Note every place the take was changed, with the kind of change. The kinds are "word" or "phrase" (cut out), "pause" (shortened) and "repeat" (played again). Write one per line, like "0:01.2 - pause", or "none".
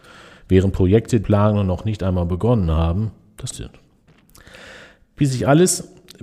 0:01.2 - word
0:03.5 - word